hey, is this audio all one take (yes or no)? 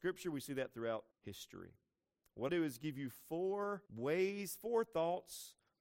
no